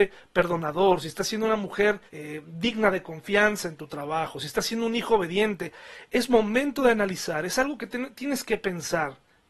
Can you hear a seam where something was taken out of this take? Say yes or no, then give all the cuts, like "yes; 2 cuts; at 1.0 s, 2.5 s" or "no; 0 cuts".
yes; 1 cut; at 2.1 s